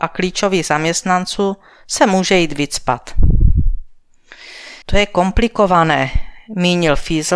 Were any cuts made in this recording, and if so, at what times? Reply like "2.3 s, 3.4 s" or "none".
4.8 s